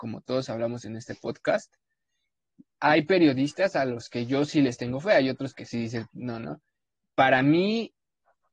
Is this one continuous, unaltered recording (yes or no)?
yes